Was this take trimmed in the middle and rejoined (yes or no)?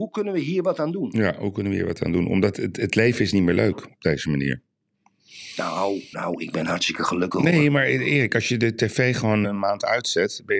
yes